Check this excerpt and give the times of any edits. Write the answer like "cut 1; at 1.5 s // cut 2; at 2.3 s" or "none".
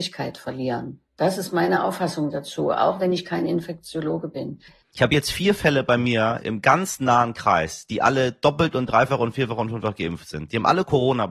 cut 1; at 1.1 s // cut 2; at 6.4 s